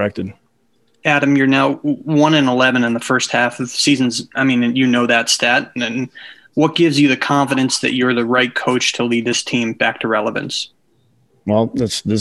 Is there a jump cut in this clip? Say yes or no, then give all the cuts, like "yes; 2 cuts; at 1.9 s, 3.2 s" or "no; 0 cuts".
no; 0 cuts